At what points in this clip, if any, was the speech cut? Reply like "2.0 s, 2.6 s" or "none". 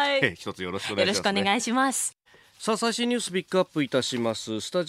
2.3 s